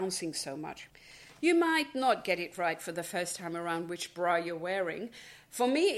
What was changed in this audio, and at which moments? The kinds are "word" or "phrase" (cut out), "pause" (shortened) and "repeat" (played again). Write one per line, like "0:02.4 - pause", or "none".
none